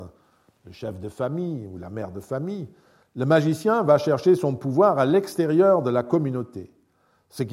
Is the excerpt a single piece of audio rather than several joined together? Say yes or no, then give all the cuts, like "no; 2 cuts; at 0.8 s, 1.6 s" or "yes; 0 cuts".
yes; 0 cuts